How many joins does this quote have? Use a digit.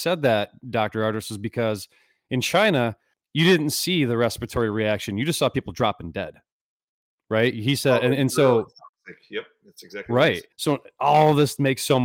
2